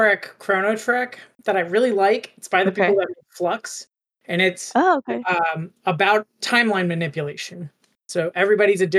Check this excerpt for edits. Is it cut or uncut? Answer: uncut